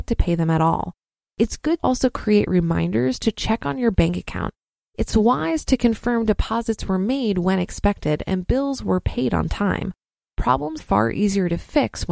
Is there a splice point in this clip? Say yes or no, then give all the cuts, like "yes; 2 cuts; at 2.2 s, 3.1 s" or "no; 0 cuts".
yes; 2 cuts; at 1.8 s, 10.8 s